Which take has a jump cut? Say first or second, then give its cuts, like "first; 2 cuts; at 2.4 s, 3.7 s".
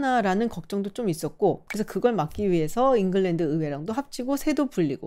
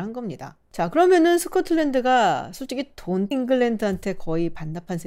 second; 1 cut; at 3.3 s